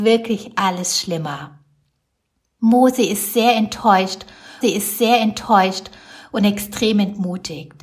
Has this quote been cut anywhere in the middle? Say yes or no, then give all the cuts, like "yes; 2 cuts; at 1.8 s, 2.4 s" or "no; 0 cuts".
yes; 1 cut; at 4.6 s